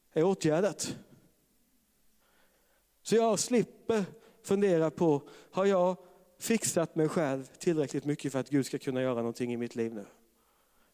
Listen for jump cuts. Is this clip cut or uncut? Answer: uncut